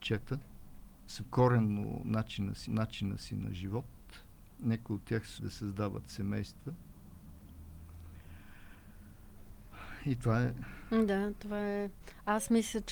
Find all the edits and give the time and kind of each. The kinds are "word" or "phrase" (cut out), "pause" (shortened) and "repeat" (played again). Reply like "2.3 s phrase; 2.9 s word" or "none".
1.2 s word; 2.7 s repeat; 5.4 s word